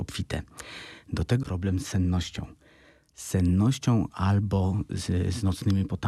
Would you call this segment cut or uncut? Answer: cut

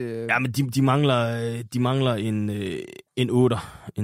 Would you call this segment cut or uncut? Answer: cut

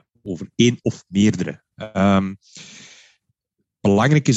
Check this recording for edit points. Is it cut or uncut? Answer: uncut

